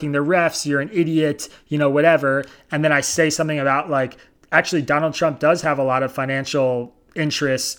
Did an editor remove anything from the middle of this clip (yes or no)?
no